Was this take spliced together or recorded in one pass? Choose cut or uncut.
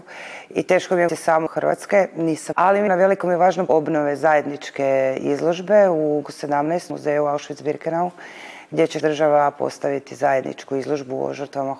cut